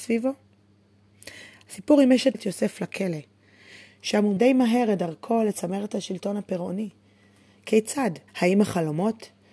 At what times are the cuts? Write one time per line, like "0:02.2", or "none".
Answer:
0:02.3
0:04.4
0:08.3